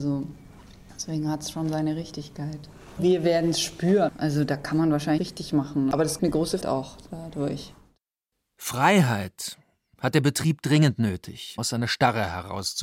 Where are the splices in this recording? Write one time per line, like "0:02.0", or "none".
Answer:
0:05.2
0:06.2
0:06.6
0:11.6

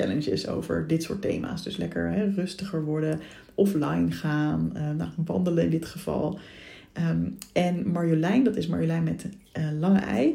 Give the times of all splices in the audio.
none

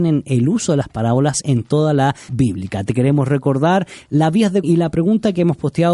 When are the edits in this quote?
0:02.3
0:04.6

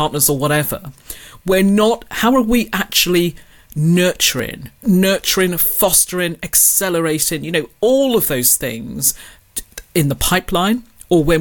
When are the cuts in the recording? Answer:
0:04.8

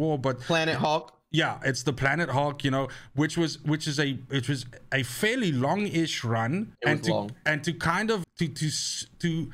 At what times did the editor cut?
0:06.7
0:08.2

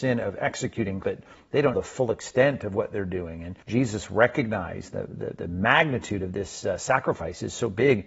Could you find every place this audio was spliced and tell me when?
0:01.0
0:01.7
0:03.6

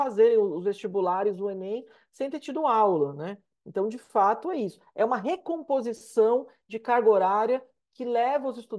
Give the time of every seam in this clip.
none

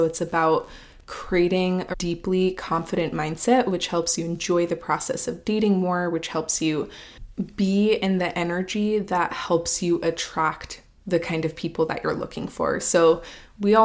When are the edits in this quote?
0:01.9

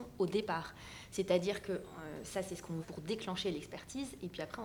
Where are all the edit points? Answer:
0:02.8

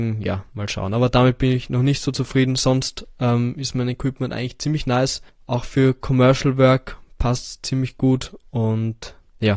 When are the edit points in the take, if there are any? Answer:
0:05.3

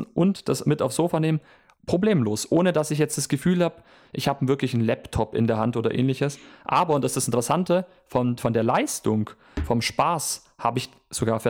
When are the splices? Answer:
none

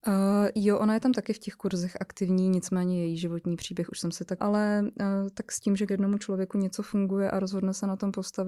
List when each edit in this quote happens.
0:04.4
0:05.9

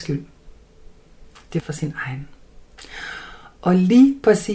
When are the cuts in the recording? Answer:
0:01.6

